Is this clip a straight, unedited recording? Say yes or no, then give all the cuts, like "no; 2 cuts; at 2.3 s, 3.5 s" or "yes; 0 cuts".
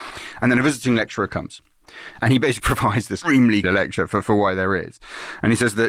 no; 3 cuts; at 2.6 s, 3.2 s, 3.6 s